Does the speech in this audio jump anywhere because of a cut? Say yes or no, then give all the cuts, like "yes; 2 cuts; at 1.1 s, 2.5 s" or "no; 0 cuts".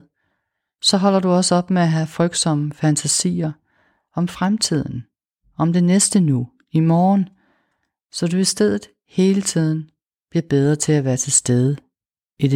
no; 0 cuts